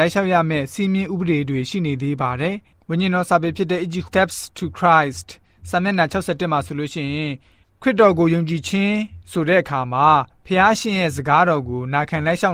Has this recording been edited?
yes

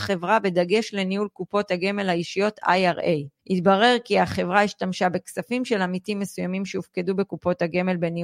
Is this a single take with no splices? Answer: no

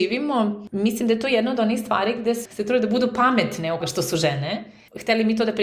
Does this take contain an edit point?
yes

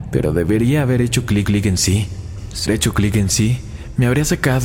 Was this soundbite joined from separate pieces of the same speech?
yes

